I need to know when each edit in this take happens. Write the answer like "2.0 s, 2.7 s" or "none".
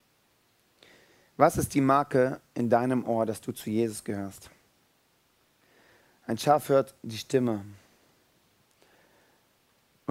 none